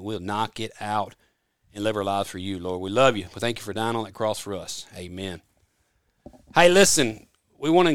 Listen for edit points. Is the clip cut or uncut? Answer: uncut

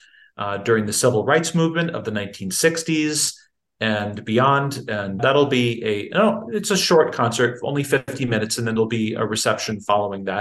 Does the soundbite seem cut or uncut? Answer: uncut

